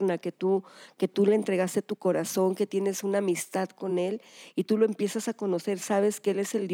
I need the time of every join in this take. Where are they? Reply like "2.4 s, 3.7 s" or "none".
none